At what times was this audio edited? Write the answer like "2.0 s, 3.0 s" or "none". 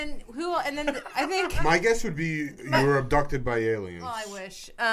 none